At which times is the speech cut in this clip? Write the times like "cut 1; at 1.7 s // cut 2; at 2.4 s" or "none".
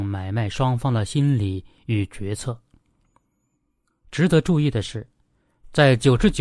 none